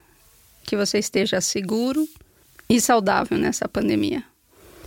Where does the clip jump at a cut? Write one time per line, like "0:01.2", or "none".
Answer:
none